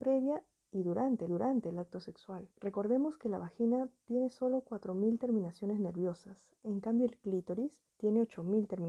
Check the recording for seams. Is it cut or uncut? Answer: cut